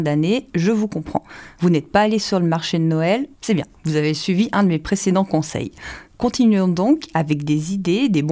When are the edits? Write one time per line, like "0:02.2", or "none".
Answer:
0:03.3

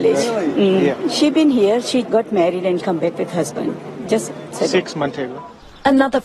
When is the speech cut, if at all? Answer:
0:02.0
0:02.8
0:04.5

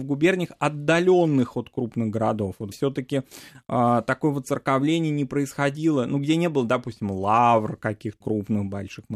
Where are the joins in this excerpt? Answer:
0:02.7
0:08.2

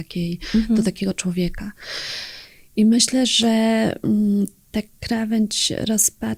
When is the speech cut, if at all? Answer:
none

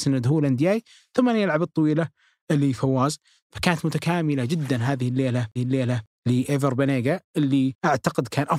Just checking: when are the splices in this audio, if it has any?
0:05.6

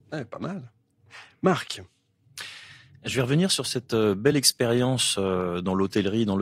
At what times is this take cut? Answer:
none

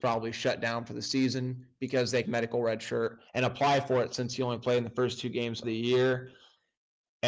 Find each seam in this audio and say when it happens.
0:02.3
0:03.3
0:05.6

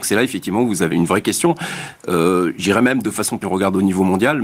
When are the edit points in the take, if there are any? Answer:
0:00.9
0:03.4

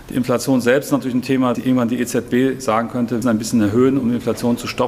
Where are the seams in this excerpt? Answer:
0:01.5
0:03.2

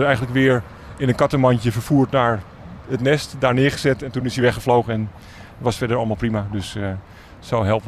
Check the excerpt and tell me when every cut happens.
none

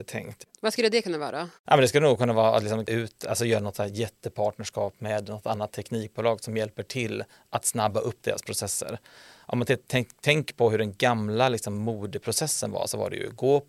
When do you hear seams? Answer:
0:02.9

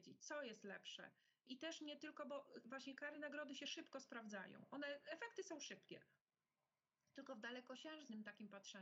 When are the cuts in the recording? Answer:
none

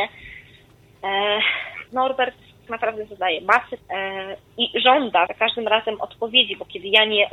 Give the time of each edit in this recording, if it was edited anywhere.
0:01.9
0:02.7
0:03.8
0:04.5
0:05.3

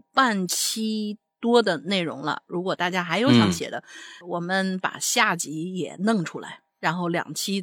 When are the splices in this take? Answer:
0:04.2

